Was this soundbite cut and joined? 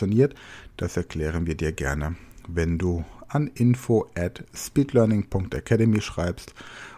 no; 0 cuts

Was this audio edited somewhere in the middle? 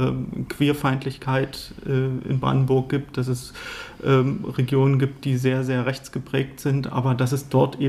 no; 0 cuts

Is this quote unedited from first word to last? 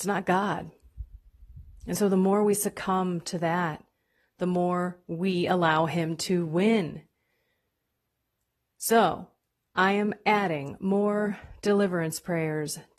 yes; 0 cuts

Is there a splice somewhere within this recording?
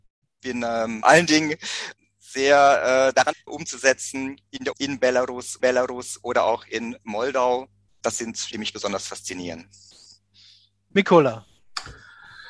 yes; 7 cuts; at 1.0 s, 2.0 s, 3.3 s, 4.7 s, 5.6 s, 7.9 s, 8.5 s

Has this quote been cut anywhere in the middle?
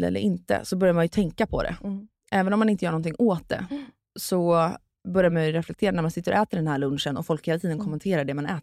no; 0 cuts

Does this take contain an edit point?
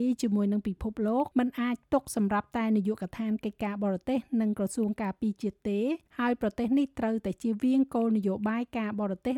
yes; 2 cuts; at 1.3 s, 6.1 s

